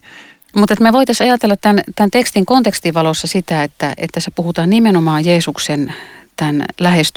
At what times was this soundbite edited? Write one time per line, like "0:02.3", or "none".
none